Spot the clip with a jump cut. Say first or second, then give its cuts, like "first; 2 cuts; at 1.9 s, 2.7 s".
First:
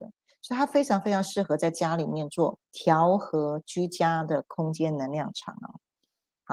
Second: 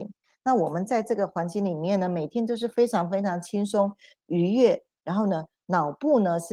first; 1 cut; at 2.6 s